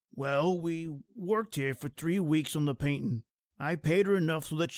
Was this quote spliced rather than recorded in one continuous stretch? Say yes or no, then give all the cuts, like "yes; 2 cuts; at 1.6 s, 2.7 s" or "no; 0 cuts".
no; 0 cuts